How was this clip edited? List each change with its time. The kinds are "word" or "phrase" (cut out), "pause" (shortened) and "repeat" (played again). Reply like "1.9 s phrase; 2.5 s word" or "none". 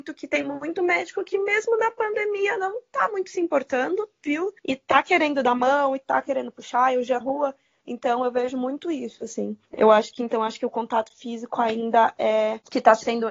4.6 s pause; 7.2 s phrase; 9.7 s pause

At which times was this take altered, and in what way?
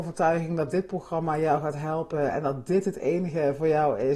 none

